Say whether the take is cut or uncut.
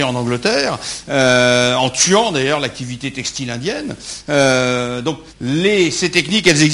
cut